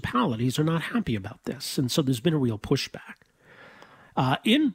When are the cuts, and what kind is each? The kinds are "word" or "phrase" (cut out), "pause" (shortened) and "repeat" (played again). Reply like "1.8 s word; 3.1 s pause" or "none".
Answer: none

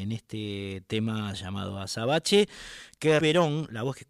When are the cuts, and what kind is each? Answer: 3.2 s word

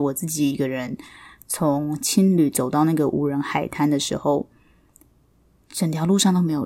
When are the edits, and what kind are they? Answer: none

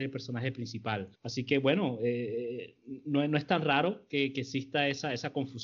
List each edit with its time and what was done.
1.2 s pause

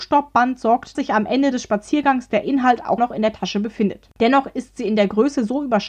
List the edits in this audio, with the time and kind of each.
0.9 s phrase; 3.0 s word; 4.1 s pause

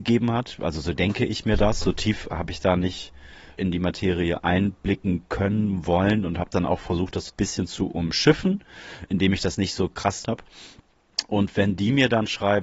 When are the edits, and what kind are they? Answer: 3.6 s word; 7.3 s word; 10.2 s phrase

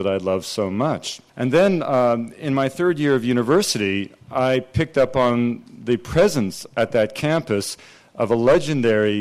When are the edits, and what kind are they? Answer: 1.3 s pause

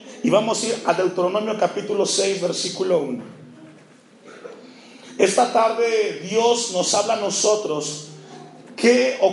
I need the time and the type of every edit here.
none

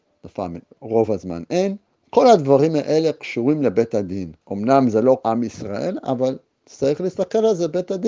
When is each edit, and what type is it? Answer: 4.4 s pause; 5.2 s word

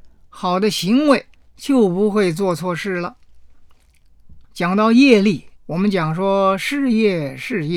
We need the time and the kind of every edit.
1.3 s pause; 4.4 s pause; 5.6 s pause

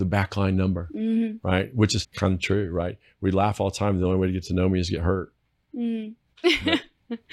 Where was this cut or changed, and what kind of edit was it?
2.0 s word

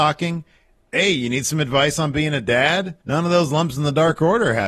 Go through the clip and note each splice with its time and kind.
3.0 s pause

